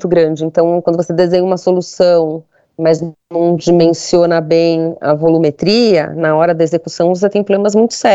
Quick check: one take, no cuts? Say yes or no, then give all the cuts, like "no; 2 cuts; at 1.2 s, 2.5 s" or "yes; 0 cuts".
yes; 0 cuts